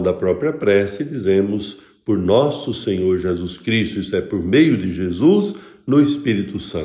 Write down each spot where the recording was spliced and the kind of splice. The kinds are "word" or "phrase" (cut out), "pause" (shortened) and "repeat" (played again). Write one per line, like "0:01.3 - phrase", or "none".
none